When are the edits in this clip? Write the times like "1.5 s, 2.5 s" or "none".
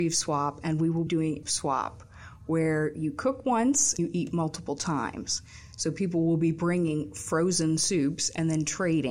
1.1 s, 1.4 s, 4.0 s